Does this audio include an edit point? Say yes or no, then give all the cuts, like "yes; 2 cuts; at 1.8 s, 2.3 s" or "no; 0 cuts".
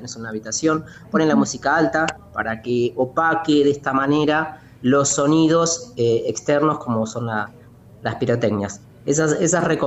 no; 0 cuts